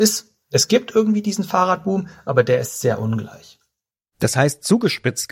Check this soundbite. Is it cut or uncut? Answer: uncut